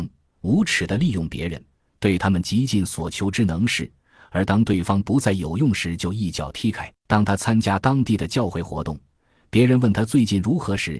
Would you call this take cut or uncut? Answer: cut